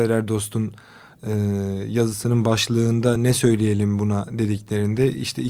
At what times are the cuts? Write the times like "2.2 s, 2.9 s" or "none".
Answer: none